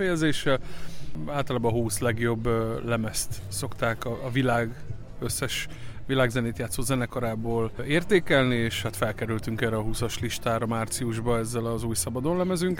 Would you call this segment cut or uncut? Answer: uncut